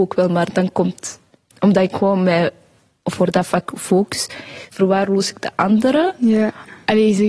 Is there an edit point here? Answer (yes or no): no